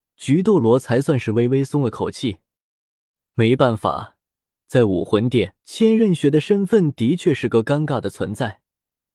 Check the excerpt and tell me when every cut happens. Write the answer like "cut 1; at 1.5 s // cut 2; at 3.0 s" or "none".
cut 1; at 5.6 s